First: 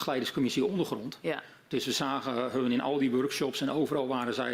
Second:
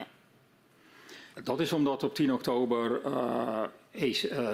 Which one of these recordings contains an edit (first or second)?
second